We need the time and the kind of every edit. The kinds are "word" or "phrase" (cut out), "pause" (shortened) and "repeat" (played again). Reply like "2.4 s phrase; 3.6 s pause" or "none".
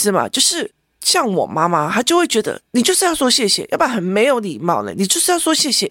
2.7 s pause